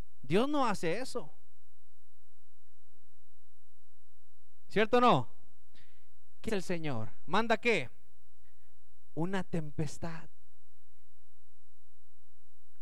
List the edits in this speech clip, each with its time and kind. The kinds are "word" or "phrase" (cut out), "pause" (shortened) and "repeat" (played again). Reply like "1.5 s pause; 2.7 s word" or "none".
6.5 s word